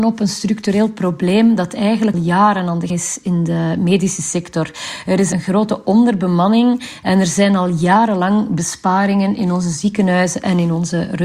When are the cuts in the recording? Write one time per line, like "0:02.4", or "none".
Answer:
0:02.1
0:02.9